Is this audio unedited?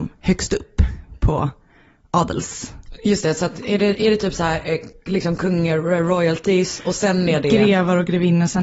yes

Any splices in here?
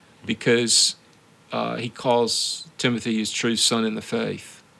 no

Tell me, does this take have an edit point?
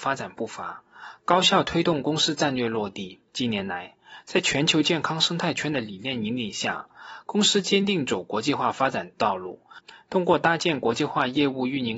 yes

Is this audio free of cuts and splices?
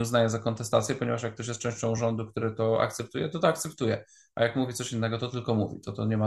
yes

